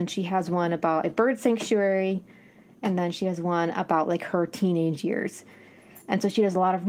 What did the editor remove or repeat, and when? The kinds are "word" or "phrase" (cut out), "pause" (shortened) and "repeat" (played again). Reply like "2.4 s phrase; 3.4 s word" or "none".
none